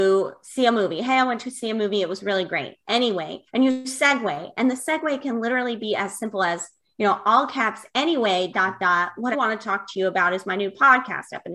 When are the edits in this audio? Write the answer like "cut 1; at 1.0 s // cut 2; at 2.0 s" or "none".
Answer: cut 1; at 3.5 s // cut 2; at 8.5 s // cut 3; at 9.3 s